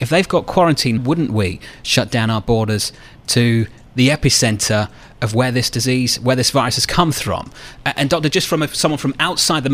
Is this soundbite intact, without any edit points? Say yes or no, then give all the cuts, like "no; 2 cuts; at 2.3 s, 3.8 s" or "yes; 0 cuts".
no; 1 cut; at 1.0 s